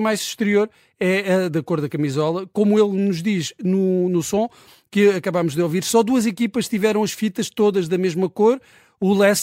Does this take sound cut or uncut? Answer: uncut